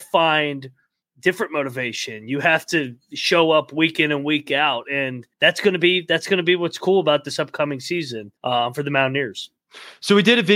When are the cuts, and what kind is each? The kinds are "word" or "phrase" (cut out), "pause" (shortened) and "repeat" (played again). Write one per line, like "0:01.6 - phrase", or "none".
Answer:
0:01.0 - pause
0:05.3 - pause
0:08.4 - pause